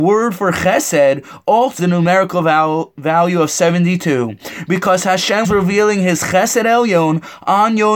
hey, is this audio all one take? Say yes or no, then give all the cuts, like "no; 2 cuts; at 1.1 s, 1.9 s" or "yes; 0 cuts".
no; 2 cuts; at 1.8 s, 5.4 s